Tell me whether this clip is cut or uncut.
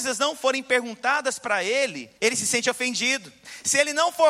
cut